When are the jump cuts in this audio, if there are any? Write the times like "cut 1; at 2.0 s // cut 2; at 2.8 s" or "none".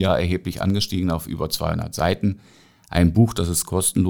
none